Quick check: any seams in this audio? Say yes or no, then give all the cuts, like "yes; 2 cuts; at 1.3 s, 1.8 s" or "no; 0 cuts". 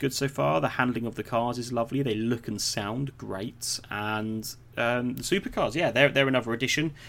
no; 0 cuts